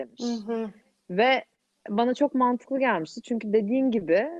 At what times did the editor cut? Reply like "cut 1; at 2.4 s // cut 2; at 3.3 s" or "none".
none